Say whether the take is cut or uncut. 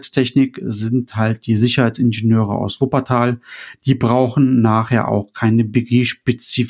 uncut